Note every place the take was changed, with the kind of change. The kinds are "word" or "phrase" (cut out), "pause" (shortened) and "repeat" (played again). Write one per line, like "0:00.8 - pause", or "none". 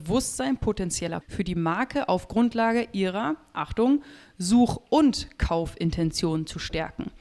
0:01.2 - word